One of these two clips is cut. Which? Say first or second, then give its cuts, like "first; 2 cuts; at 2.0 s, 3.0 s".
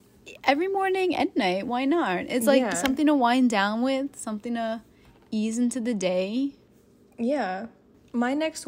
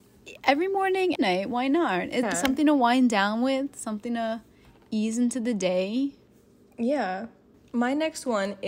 second; 2 cuts; at 1.1 s, 2.2 s